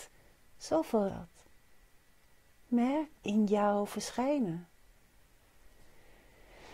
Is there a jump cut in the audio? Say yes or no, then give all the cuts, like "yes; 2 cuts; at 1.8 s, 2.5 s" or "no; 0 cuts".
yes; 2 cuts; at 1.1 s, 3.1 s